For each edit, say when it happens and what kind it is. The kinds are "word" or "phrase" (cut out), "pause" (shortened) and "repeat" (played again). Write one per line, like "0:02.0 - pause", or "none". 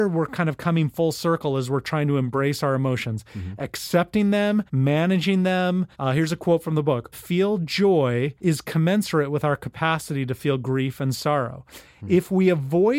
0:04.7 - pause
0:05.9 - pause
0:07.1 - phrase
0:08.4 - pause